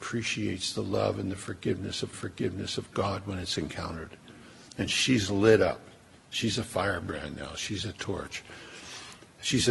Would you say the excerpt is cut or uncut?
cut